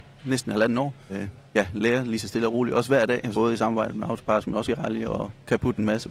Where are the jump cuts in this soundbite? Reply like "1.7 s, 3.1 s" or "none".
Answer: 1.1 s, 3.3 s, 4.7 s